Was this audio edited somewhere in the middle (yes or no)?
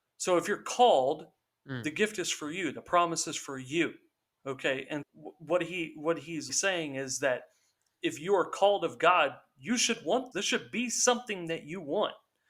yes